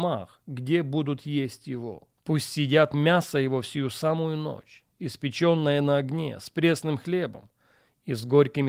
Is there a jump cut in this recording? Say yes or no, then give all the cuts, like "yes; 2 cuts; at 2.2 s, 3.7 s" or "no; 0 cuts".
yes; 1 cut; at 2.2 s